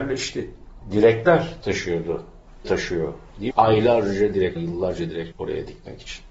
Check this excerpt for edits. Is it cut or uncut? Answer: cut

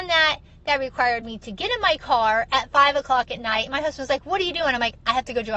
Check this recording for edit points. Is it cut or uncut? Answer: uncut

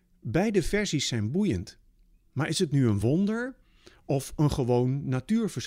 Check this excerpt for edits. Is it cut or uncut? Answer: uncut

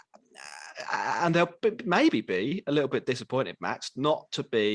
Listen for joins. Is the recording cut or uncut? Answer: uncut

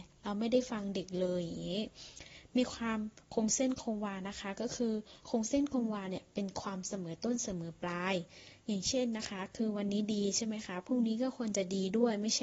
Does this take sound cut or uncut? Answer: cut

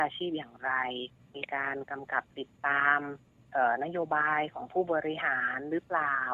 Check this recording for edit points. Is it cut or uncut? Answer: cut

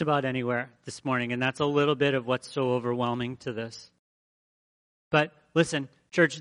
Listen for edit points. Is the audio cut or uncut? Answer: uncut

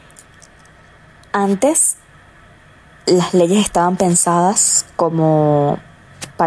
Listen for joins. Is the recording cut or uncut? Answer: uncut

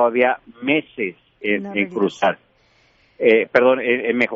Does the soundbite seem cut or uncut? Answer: uncut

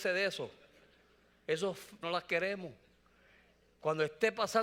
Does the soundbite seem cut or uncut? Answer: cut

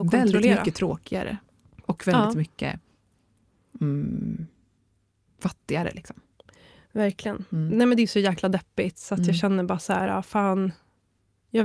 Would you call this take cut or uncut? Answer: uncut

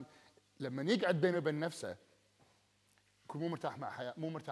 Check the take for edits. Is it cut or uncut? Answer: uncut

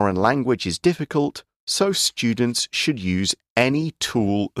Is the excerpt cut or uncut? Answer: uncut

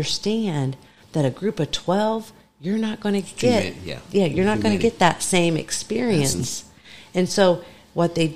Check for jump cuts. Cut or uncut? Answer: uncut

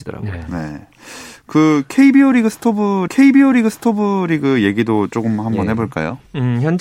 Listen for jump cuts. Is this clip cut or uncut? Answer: cut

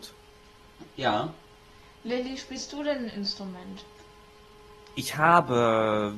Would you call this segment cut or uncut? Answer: uncut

